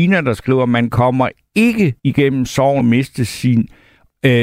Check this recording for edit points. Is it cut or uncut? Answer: cut